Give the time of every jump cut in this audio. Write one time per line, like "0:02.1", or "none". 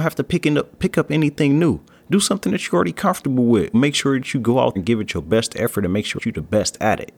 0:03.7
0:04.8
0:06.2